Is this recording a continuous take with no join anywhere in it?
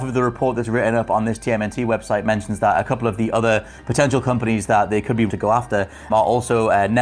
no; 2 cuts; at 5.3 s, 6.1 s

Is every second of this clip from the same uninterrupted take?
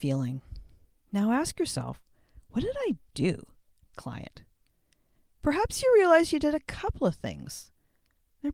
no; 2 cuts; at 0.9 s, 3.9 s

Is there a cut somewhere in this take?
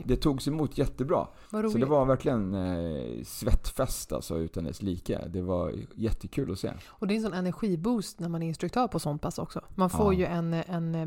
yes; 1 cut; at 1.5 s

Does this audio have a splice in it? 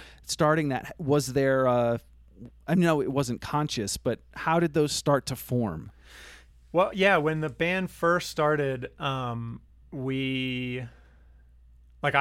no; 0 cuts

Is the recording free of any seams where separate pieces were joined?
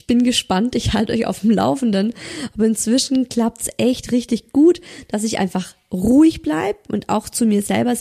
yes; 0 cuts

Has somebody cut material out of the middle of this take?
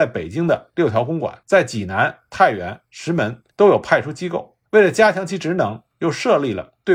yes; 3 cuts; at 1.4 s, 3.5 s, 4.7 s

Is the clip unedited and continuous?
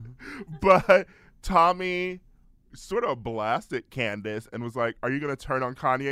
yes; 0 cuts

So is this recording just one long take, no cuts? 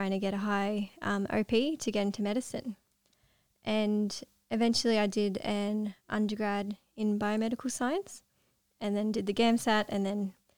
yes; 0 cuts

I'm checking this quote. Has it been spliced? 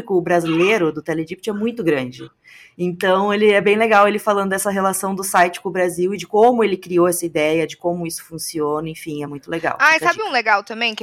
no; 0 cuts

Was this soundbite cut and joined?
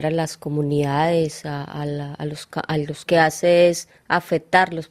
yes; 1 cut; at 3.1 s

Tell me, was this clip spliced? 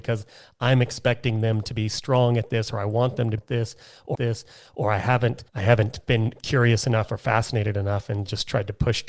yes; 3 cuts; at 3.4 s, 4.1 s, 5.5 s

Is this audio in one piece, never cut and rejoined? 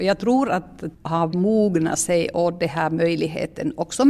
no; 2 cuts; at 0.9 s, 1.3 s

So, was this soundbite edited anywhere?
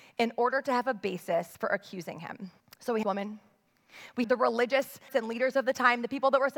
yes; 5 cuts; at 1.5 s, 2.6 s, 3.0 s, 4.2 s, 5.1 s

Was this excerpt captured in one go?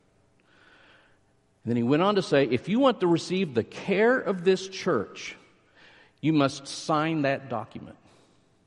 yes; 0 cuts

